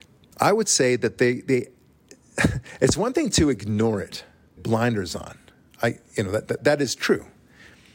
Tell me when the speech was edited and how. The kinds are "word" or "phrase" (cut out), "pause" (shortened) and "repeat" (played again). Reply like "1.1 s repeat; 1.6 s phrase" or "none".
4.6 s word; 6.6 s word